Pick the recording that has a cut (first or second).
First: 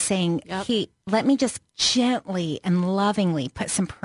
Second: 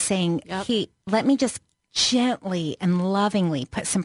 first